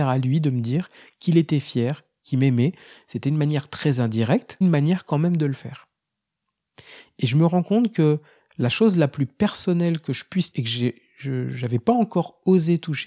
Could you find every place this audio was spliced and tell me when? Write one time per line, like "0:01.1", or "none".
0:04.6
0:10.5